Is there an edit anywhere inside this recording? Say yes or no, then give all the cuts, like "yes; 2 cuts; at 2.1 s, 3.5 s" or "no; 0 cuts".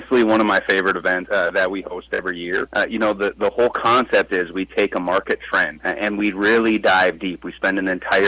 no; 0 cuts